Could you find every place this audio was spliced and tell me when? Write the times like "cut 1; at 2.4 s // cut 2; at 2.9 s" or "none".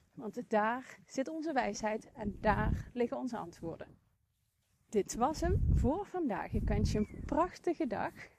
cut 1; at 4.6 s